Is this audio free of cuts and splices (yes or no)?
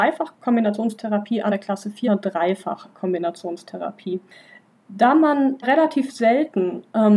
no